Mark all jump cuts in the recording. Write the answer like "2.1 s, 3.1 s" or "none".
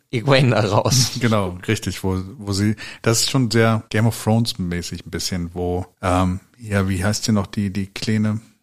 3.9 s, 5.9 s

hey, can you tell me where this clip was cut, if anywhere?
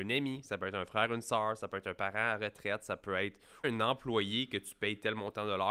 3.6 s

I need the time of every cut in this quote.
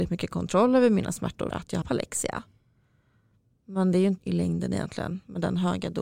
1.5 s, 1.8 s, 4.2 s

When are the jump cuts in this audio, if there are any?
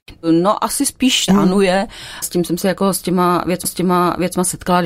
1.3 s, 2.2 s, 3.6 s

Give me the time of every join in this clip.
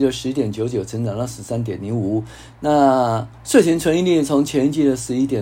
3.3 s

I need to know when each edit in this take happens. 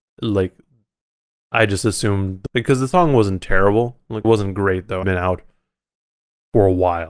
2.5 s, 4.2 s, 5.0 s

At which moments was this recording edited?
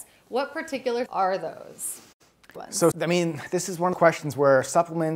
1.1 s, 2.6 s, 2.9 s, 3.9 s

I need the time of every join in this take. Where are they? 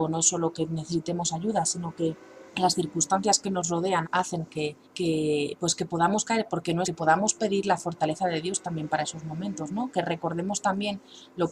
2.5 s, 4.0 s, 4.8 s, 6.8 s

